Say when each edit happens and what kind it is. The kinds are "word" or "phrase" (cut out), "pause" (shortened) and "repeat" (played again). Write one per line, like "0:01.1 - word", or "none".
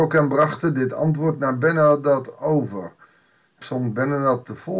0:03.6 - word